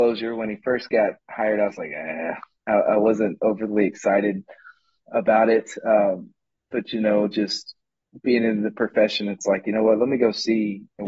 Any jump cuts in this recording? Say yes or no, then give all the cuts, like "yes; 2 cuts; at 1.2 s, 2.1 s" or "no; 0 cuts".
no; 0 cuts